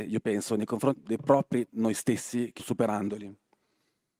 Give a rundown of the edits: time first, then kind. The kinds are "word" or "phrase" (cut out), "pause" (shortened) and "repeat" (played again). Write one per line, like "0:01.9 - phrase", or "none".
0:01.0 - word
0:01.7 - word
0:02.6 - word

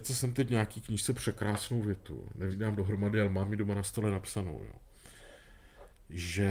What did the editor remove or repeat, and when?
0:02.5 - word

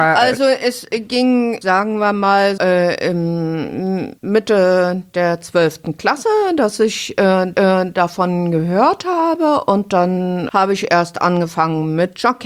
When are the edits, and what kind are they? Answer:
0:01.6 - word
0:02.6 - word
0:04.2 - pause
0:07.5 - repeat
0:10.5 - word

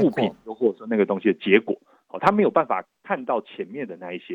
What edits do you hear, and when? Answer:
none

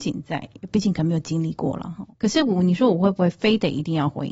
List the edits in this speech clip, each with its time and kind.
0:02.1 - pause

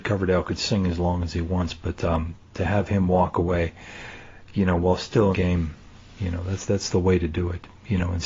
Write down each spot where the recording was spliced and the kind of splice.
0:02.5 - phrase
0:05.3 - phrase

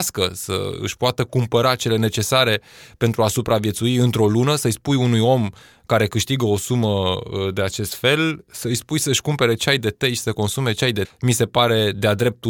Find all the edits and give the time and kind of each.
0:11.0 - word

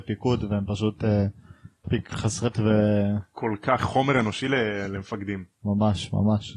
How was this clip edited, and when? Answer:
0:01.8 - word
0:02.5 - word
0:03.8 - word

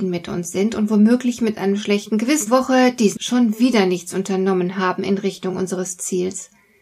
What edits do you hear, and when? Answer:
0:02.5 - phrase
0:03.2 - word

